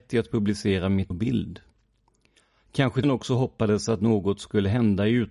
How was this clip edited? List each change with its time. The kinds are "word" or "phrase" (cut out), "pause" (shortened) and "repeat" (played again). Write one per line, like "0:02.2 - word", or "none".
0:01.1 - word
0:03.0 - word